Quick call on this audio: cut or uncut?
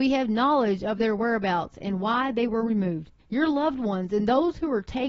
cut